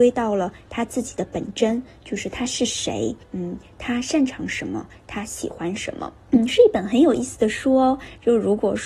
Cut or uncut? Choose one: cut